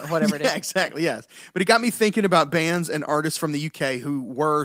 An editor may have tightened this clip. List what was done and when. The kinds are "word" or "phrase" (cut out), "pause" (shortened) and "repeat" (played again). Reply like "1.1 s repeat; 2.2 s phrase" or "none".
none